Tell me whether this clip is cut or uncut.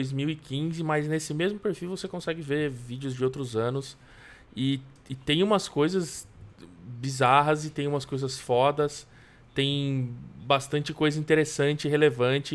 uncut